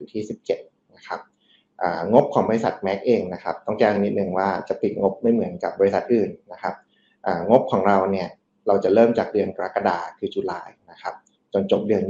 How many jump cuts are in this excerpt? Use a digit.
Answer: 0